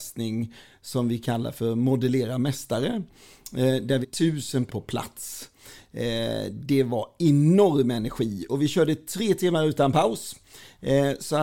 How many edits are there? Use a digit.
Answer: 2